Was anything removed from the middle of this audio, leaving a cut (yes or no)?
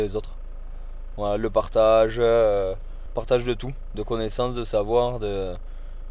no